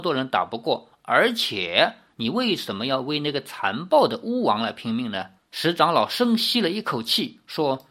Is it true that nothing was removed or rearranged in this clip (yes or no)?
no